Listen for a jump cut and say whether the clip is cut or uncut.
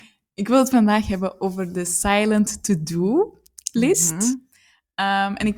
uncut